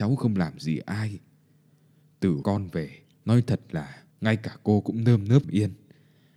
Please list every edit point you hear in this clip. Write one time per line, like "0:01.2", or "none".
0:02.4
0:03.1
0:04.1
0:05.4